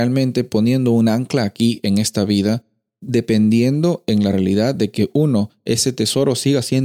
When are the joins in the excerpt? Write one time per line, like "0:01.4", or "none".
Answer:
none